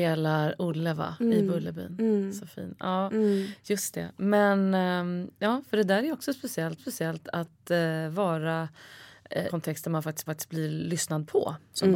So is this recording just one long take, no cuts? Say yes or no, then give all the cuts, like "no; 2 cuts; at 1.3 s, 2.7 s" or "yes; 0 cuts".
no; 3 cuts; at 6.8 s, 9.5 s, 10.3 s